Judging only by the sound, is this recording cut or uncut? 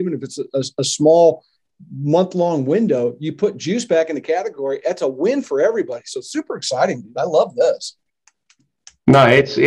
uncut